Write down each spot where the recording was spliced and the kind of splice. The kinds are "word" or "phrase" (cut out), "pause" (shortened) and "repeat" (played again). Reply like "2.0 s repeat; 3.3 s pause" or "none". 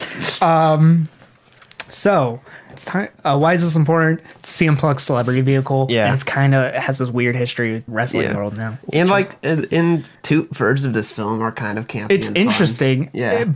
2.7 s word; 7.9 s word; 8.8 s pause; 10.2 s pause